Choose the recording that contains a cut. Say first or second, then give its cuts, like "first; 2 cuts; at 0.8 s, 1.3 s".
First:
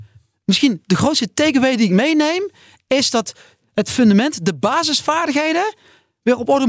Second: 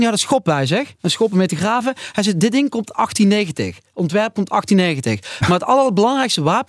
second; 1 cut; at 1.0 s